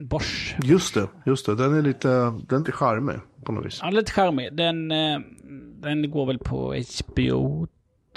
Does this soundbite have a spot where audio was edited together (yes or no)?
yes